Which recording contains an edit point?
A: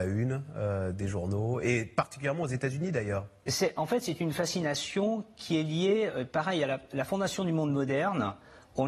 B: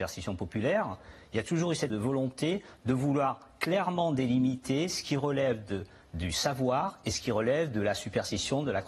B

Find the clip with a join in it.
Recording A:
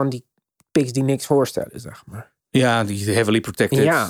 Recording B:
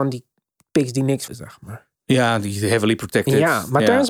B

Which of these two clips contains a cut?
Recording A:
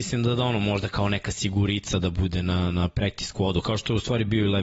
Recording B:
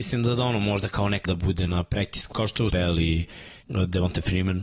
B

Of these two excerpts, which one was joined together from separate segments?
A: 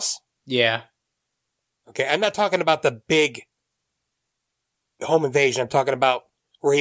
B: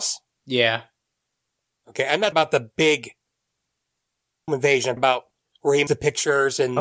B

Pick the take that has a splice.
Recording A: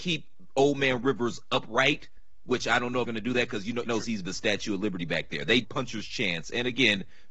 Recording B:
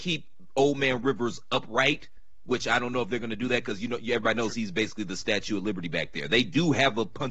A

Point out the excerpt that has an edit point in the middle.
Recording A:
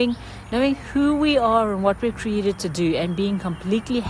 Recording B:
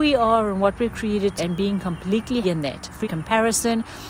B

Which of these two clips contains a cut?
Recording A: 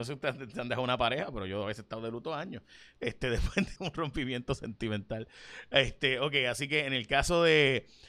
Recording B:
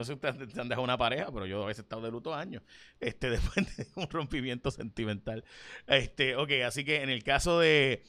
A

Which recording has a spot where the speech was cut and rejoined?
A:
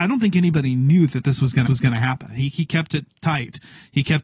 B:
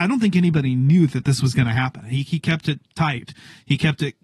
A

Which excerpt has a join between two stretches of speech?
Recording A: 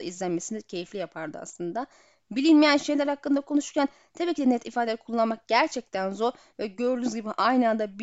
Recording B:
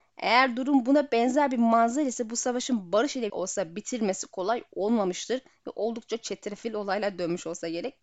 B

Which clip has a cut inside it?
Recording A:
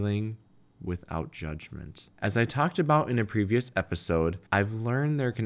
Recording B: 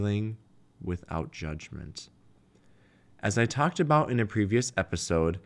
A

